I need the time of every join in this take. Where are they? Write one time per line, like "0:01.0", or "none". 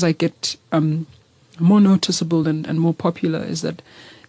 none

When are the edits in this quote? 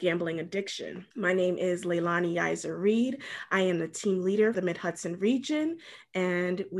0:01.1
0:04.5

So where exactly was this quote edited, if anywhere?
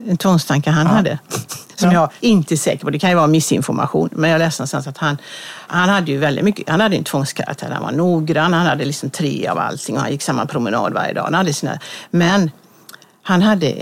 0:02.2
0:05.7

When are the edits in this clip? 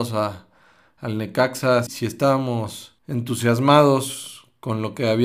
0:01.9
0:03.0

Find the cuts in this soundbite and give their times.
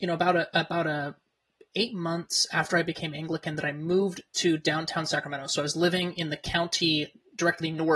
none

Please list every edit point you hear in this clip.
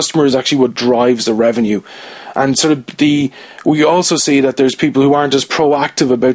none

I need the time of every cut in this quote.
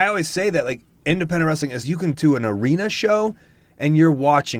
0:01.8
0:02.1

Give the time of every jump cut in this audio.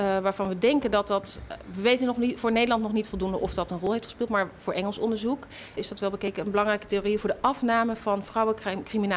0:05.8

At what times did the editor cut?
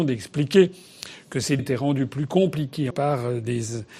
0:01.6
0:02.9

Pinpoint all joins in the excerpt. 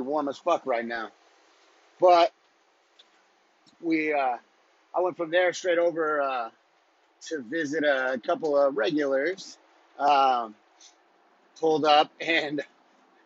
none

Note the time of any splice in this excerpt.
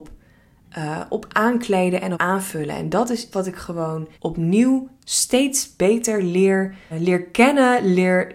0:02.1
0:03.3
0:04.1
0:06.9

